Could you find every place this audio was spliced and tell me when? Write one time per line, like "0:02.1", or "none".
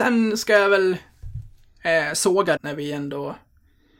0:02.6